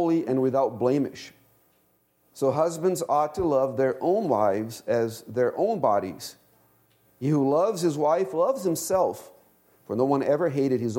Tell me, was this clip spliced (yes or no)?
no